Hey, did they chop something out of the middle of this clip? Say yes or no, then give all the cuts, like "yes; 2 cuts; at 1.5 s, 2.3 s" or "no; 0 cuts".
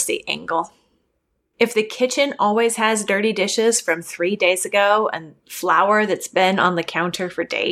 yes; 1 cut; at 5.4 s